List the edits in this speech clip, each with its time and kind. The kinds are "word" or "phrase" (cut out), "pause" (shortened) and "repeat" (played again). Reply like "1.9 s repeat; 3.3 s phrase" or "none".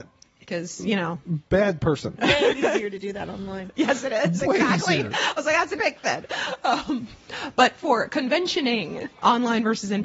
5.8 s word; 9.1 s pause